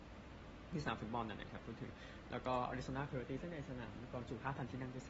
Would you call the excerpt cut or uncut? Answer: uncut